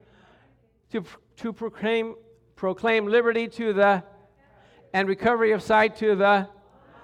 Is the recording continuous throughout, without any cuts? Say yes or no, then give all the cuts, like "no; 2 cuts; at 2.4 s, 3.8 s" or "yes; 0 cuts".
yes; 0 cuts